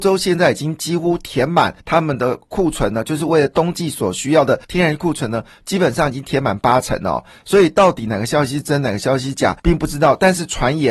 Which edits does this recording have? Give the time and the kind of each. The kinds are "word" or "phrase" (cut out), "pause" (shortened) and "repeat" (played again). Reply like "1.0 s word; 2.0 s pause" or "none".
1.8 s pause; 4.6 s pause; 9.6 s pause

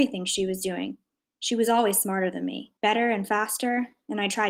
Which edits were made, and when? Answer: 2.8 s pause

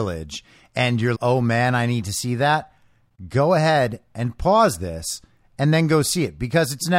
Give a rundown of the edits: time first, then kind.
1.1 s word

